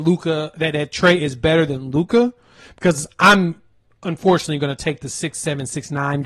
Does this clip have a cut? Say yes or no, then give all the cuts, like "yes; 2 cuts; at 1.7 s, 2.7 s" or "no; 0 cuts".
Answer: no; 0 cuts